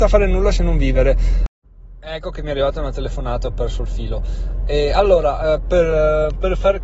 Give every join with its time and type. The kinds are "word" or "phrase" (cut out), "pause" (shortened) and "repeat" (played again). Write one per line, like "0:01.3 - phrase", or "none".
none